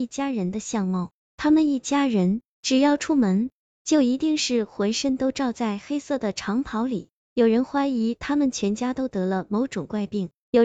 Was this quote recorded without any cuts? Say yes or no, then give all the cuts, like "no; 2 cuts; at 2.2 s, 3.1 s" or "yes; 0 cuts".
yes; 0 cuts